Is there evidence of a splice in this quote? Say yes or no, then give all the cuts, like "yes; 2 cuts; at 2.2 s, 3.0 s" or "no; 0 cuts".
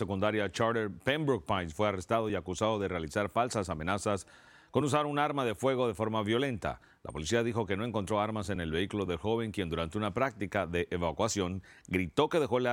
no; 0 cuts